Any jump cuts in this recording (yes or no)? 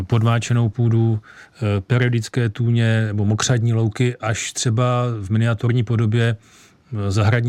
no